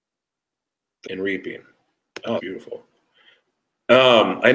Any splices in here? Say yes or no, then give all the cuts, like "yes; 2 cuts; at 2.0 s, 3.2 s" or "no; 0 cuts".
yes; 2 cuts; at 1.0 s, 2.4 s